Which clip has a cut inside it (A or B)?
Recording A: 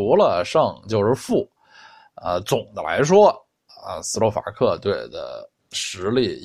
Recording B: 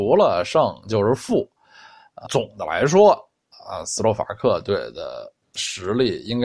B